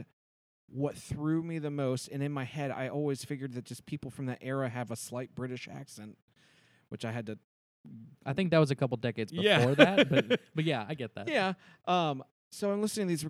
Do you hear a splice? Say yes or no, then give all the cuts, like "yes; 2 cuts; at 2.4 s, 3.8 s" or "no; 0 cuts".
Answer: no; 0 cuts